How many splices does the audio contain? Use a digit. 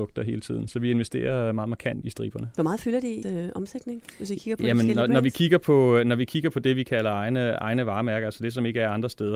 2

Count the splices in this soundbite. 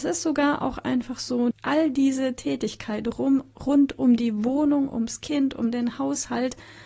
1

